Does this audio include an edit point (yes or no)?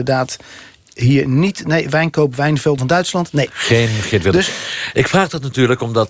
yes